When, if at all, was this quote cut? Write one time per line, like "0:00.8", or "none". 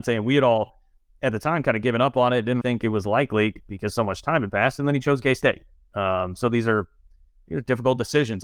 0:02.6